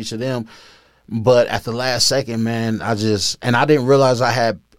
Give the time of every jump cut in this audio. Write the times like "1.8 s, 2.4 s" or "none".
none